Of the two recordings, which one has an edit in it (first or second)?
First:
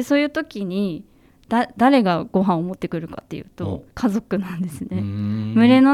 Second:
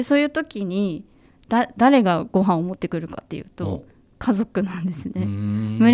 first